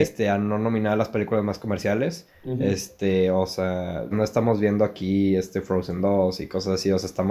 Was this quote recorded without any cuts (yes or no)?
no